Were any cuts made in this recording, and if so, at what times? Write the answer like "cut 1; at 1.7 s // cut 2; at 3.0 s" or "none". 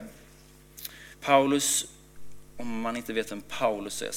cut 1; at 1.1 s